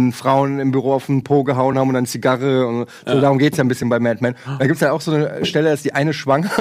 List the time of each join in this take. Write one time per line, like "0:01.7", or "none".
none